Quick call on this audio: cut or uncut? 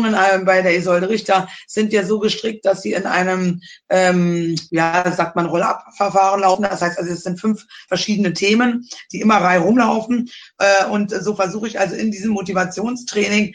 uncut